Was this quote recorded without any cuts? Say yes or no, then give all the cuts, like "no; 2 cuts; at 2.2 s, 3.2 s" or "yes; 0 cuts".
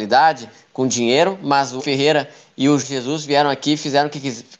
no; 2 cuts; at 1.8 s, 2.8 s